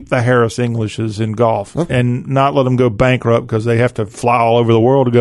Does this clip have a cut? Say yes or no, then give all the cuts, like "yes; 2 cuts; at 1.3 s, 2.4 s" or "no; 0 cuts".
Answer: yes; 1 cut; at 1.9 s